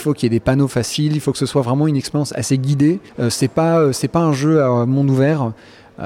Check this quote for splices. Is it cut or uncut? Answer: cut